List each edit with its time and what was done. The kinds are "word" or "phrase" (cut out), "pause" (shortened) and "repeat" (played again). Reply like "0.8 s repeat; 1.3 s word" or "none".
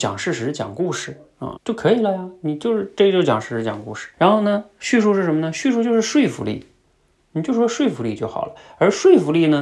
1.6 s word; 4.1 s pause